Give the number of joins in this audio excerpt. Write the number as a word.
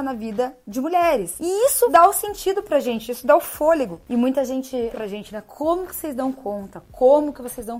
one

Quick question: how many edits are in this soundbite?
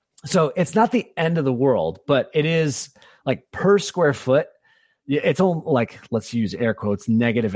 zero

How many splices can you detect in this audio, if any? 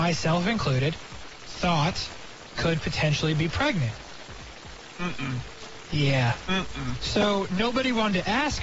one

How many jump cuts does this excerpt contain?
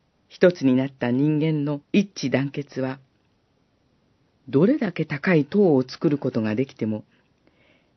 one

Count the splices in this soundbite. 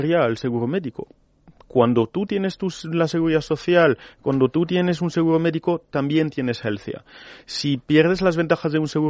zero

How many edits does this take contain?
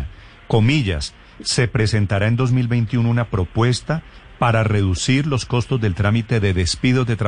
zero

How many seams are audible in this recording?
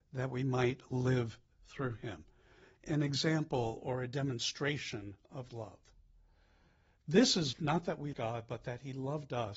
three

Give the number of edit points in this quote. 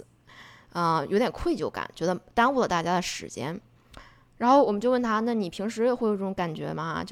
zero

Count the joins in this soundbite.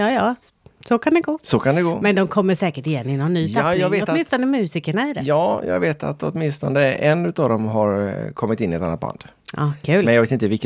zero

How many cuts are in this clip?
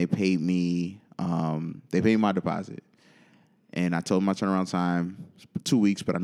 zero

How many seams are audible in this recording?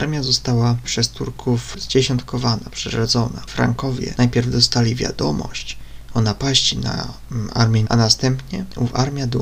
one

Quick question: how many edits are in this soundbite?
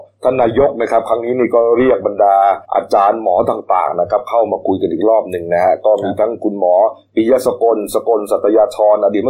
one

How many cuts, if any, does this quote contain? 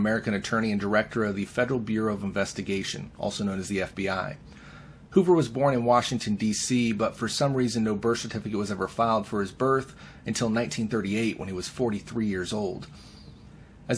zero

